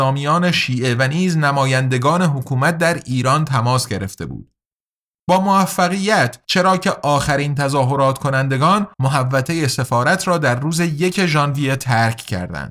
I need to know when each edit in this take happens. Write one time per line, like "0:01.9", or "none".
0:06.4
0:08.9